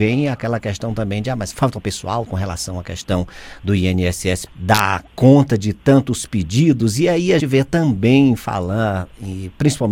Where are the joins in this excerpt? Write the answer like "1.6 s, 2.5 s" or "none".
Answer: 1.5 s, 2.3 s, 4.5 s, 5.1 s, 7.4 s